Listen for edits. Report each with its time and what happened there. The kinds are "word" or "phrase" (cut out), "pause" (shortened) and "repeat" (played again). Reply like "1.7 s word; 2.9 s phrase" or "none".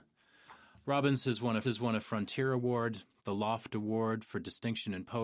1.6 s repeat